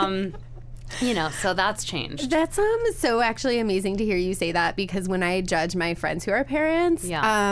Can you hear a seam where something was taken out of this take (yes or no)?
no